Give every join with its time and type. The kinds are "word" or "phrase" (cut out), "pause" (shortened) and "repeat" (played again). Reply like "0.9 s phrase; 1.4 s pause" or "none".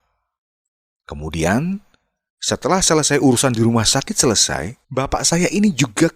4.8 s pause